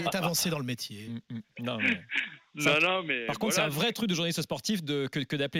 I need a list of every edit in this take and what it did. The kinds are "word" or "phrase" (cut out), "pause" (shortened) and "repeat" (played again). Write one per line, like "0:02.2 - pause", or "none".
none

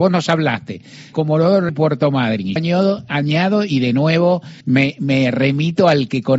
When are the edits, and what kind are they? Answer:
0:01.1 - word
0:01.7 - word
0:02.6 - word
0:04.6 - pause

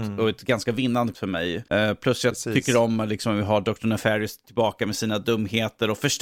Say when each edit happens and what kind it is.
0:01.1 - word

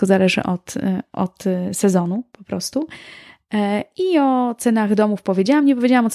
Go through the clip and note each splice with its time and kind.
none

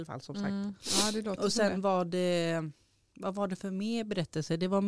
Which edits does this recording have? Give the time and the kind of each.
none

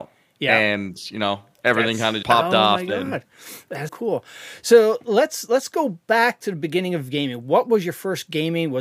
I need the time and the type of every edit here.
0:02.2 - word
0:03.9 - word

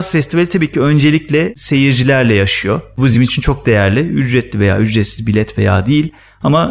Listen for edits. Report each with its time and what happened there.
none

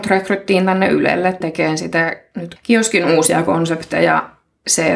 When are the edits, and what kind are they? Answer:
0:01.4 - word
0:02.6 - word

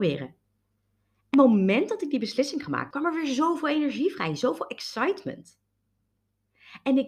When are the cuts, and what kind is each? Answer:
0:01.3 - word
0:02.9 - word

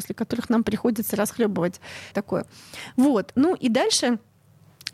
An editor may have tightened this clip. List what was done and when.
0:02.1 - word

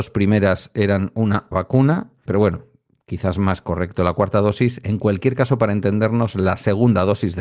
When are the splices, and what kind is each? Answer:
0:01.5 - word
0:02.3 - word

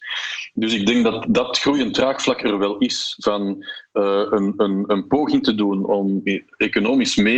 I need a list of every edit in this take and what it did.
none

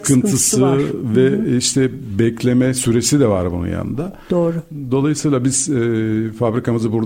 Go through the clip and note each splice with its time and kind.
none

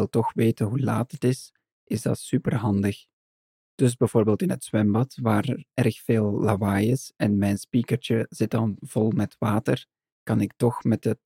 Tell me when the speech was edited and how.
none

